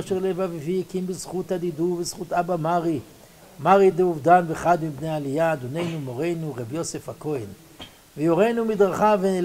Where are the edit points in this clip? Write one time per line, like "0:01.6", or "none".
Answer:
none